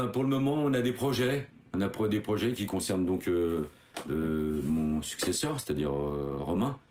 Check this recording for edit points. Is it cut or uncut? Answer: uncut